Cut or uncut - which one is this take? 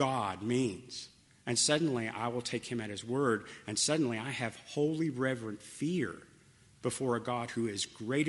uncut